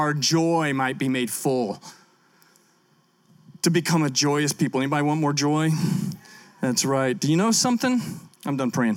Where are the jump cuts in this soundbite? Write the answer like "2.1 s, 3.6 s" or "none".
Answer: none